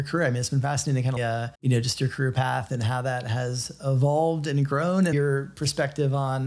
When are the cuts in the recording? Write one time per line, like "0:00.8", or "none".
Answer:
0:01.2
0:01.5
0:05.1